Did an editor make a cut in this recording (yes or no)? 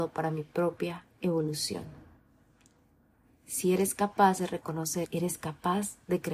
yes